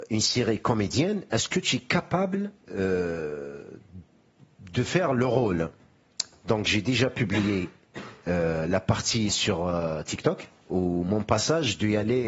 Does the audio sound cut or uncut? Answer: cut